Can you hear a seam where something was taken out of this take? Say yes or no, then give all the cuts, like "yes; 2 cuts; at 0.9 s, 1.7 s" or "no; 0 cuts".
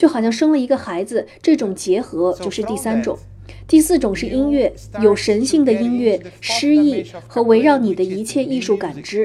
no; 0 cuts